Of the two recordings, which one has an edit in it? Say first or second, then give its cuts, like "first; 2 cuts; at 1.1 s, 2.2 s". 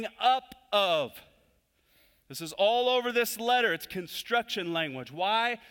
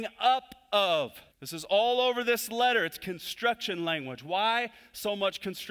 second; 1 cut; at 1.3 s